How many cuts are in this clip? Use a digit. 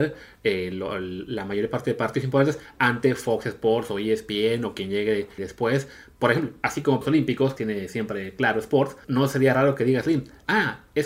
4